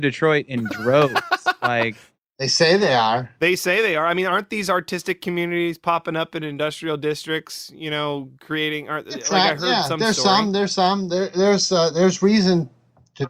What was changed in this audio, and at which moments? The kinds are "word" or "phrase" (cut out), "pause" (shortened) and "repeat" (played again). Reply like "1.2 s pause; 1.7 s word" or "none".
none